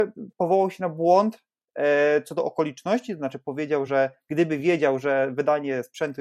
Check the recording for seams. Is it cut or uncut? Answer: uncut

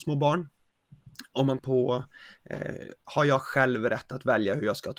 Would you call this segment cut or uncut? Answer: cut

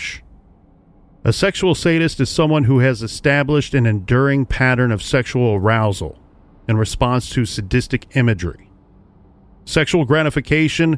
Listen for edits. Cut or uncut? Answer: uncut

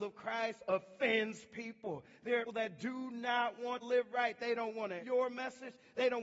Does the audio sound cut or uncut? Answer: cut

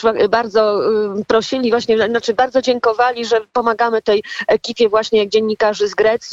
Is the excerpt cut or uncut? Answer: uncut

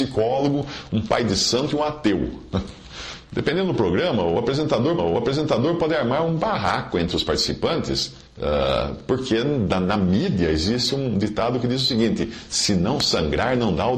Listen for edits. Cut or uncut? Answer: cut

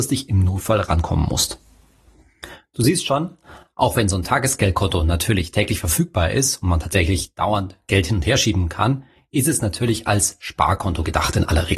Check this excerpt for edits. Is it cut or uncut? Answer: uncut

